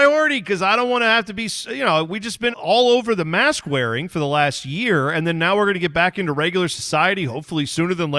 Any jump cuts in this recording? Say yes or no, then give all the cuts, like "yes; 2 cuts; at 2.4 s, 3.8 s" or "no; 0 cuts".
yes; 1 cut; at 2.5 s